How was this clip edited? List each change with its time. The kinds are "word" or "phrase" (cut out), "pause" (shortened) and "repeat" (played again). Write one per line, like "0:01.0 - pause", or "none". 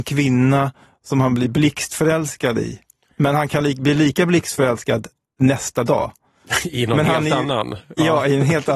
none